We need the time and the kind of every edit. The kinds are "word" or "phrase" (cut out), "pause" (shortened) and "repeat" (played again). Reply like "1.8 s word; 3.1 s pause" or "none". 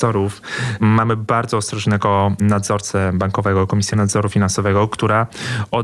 none